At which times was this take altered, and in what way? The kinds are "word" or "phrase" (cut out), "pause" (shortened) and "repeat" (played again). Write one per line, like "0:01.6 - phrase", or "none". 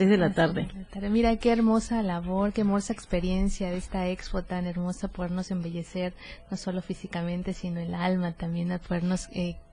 none